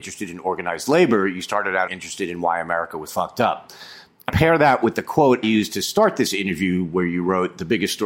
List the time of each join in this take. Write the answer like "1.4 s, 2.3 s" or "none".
1.9 s, 3.1 s, 4.3 s, 5.4 s